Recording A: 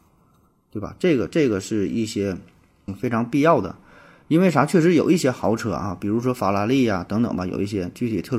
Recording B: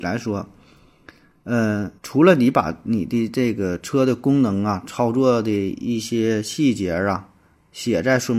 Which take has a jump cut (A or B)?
B